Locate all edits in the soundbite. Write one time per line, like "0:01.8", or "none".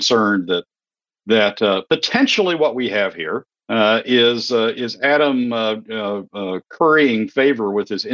0:03.5